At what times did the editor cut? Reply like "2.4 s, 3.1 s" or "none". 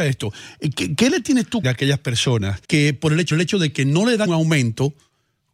1.6 s, 2.6 s, 3.3 s, 4.3 s